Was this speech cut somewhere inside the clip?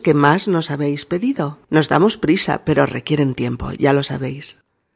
yes; 1 cut; at 1.6 s

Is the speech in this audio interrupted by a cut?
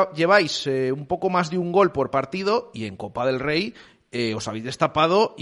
no; 0 cuts

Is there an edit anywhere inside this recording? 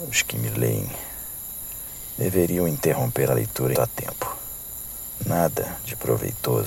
yes; 2 cuts; at 3.3 s, 3.7 s

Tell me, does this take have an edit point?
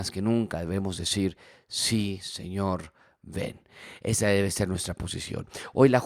no; 0 cuts

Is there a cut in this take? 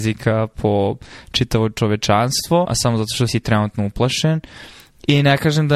yes; 2 cuts; at 2.6 s, 3.3 s

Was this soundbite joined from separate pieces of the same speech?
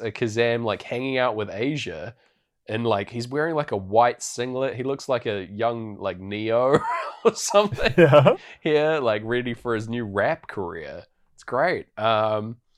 no; 0 cuts

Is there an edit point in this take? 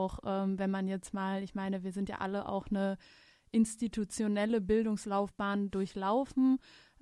no; 0 cuts

